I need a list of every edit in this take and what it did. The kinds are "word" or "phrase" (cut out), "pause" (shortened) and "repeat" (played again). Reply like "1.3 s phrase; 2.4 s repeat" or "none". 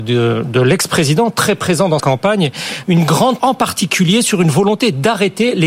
2.0 s word; 2.8 s word; 3.4 s word